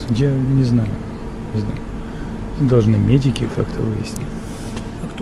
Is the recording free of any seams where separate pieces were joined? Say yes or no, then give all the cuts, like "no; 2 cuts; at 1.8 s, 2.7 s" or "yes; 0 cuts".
no; 1 cut; at 1.5 s